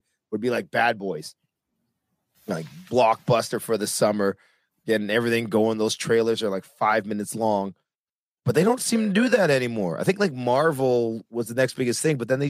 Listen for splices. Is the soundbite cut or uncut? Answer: uncut